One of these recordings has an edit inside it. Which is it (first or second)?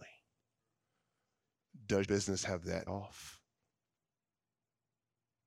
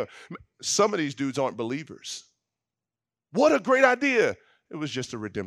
first